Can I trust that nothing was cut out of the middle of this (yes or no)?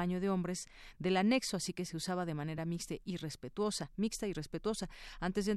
yes